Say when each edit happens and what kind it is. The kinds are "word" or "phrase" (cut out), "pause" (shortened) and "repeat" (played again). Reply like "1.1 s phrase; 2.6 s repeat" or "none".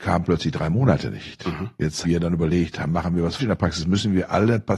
2.0 s word; 3.4 s word